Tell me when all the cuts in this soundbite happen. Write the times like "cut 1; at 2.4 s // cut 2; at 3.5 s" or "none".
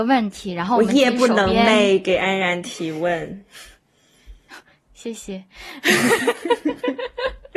none